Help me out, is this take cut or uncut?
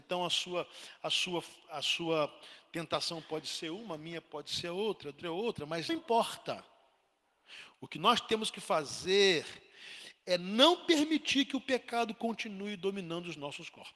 cut